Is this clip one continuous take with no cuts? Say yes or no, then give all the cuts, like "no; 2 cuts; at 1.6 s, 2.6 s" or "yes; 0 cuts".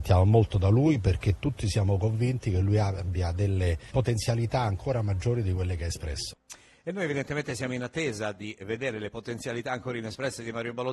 yes; 0 cuts